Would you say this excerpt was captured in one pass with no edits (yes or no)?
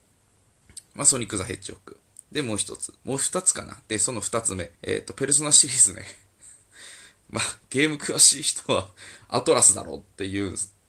no